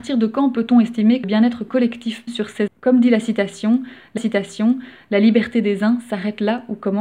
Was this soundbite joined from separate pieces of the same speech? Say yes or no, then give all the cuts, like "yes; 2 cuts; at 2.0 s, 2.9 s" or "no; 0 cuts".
yes; 4 cuts; at 1.2 s, 2.3 s, 2.7 s, 4.2 s